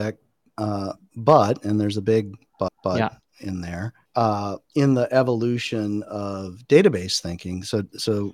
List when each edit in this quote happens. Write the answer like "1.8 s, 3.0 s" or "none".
2.7 s, 4.1 s